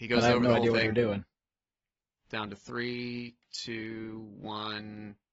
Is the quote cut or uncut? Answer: cut